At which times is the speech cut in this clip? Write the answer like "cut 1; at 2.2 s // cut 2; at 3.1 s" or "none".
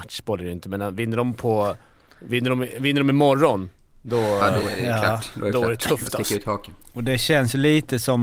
none